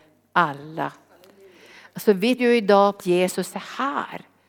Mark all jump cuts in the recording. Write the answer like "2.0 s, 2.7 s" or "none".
2.4 s, 3.0 s